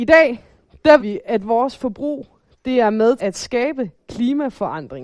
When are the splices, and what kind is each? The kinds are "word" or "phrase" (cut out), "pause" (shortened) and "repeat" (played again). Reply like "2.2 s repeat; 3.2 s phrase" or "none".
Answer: 1.0 s word; 3.2 s word

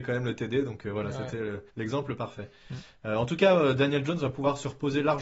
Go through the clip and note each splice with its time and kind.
1.7 s pause

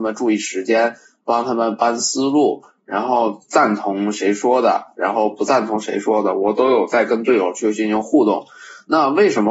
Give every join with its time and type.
none

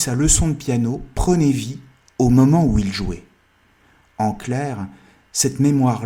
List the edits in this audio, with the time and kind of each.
none

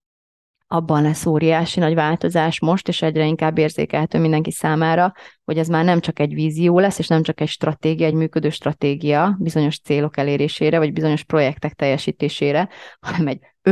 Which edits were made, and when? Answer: none

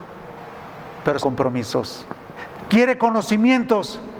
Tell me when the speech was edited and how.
1.2 s word

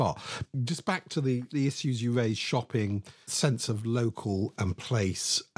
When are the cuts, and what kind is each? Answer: none

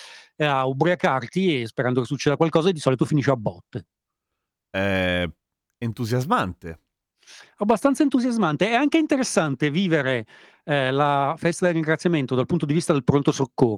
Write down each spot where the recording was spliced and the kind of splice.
none

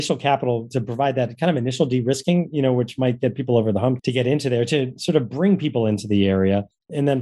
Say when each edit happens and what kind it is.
none

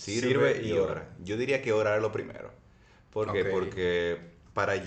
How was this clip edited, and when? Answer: none

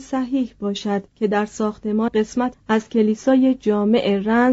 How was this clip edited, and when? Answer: 1.1 s pause; 2.1 s phrase; 2.5 s phrase

